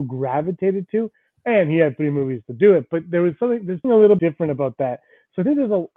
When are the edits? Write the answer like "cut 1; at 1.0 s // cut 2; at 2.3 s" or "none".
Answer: cut 1; at 3.8 s // cut 2; at 4.2 s